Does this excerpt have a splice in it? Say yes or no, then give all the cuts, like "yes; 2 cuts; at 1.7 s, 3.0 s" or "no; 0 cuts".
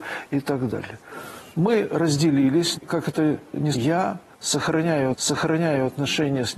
yes; 3 cuts; at 2.7 s, 3.7 s, 5.1 s